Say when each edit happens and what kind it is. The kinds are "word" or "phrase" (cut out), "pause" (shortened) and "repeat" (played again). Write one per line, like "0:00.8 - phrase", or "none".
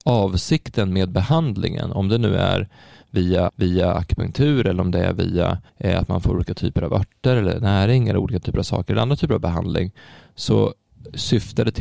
0:03.5 - repeat
0:05.7 - pause